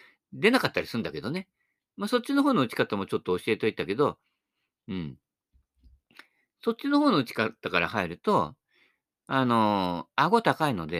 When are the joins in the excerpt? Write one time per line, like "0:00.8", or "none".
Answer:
none